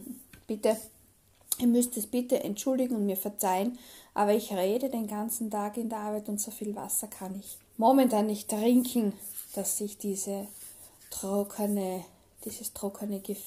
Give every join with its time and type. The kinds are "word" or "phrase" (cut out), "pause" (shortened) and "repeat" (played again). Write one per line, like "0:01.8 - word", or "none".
0:07.7 - pause
0:11.0 - pause